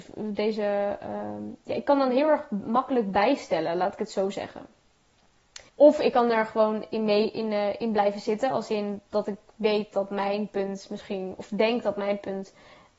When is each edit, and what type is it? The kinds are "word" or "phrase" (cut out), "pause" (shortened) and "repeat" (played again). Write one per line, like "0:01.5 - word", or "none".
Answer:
0:05.7 - pause